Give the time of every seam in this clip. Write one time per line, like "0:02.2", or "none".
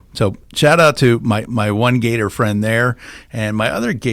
none